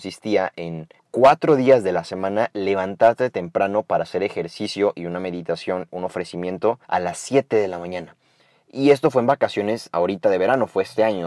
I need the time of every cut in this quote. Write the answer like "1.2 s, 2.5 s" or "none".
1.0 s, 6.8 s

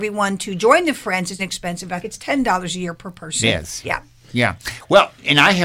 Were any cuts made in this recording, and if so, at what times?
1.4 s, 2.0 s, 3.8 s

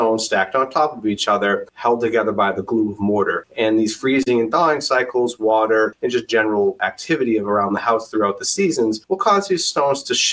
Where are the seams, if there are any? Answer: none

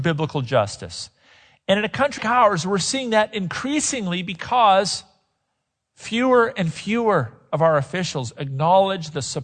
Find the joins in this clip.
2.2 s

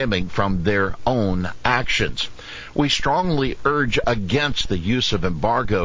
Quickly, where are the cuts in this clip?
none

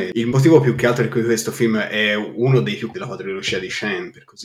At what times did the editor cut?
2.9 s

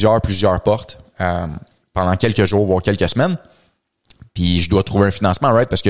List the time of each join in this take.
none

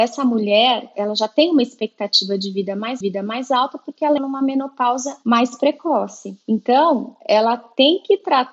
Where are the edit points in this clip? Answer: 3.0 s, 4.2 s

